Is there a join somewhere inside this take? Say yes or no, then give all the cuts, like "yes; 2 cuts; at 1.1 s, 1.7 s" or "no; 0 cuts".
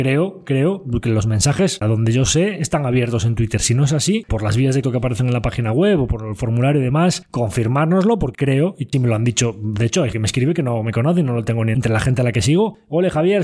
yes; 6 cuts; at 1.8 s, 4.3 s, 4.8 s, 8.3 s, 8.9 s, 10.1 s